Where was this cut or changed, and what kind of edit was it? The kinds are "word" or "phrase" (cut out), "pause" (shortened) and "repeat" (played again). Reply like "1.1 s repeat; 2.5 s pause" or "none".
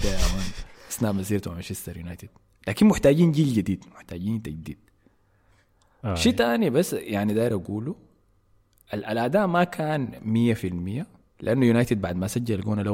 11.3 s pause